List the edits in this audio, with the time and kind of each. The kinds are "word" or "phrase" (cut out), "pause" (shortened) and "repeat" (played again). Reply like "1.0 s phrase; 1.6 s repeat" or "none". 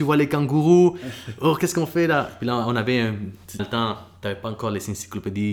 3.6 s word